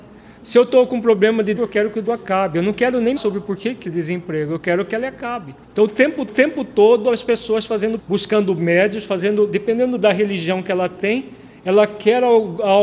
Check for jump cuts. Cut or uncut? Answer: cut